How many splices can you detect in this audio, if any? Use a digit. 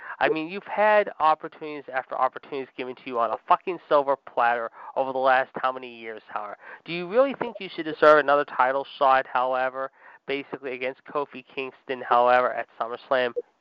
0